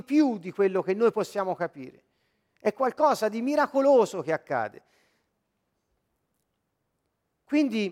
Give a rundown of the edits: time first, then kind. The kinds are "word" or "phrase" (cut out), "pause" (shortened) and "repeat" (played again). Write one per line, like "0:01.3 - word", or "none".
none